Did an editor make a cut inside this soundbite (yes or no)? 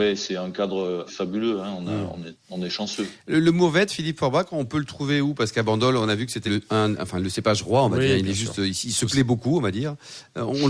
yes